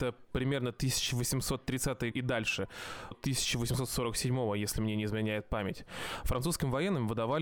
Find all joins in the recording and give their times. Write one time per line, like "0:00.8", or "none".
0:02.1
0:03.1